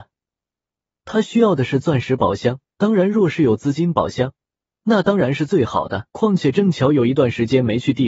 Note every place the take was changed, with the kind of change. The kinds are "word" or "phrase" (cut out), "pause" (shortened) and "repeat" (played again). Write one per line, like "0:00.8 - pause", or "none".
0:02.6 - pause
0:06.1 - pause